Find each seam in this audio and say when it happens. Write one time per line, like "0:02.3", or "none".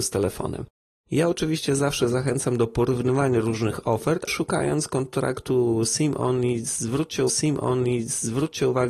0:04.3
0:07.3